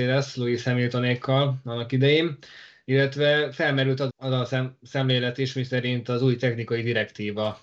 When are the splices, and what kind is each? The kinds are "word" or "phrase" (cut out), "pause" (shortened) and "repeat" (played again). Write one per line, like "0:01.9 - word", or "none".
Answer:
0:04.1 - word